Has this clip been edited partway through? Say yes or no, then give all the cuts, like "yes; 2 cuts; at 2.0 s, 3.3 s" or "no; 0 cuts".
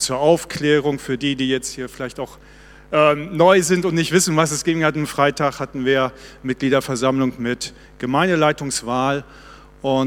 no; 0 cuts